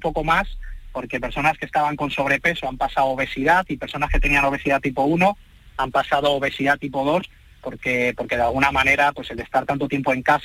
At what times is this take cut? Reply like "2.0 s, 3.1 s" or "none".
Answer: none

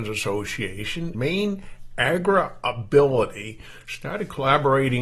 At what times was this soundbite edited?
1.1 s

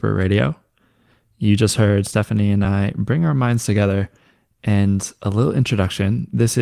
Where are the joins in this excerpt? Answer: none

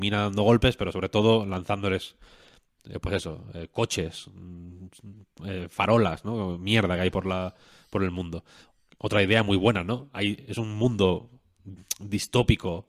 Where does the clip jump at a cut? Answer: none

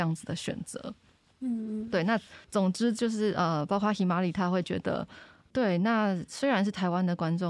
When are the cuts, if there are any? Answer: 2.4 s

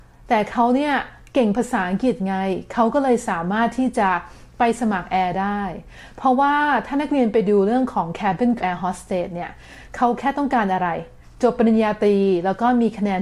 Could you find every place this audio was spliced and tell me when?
8.6 s

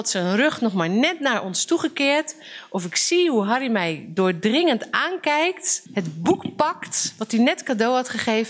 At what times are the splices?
5.9 s

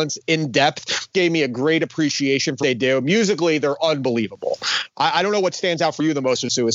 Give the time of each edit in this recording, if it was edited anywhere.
1.1 s, 2.6 s

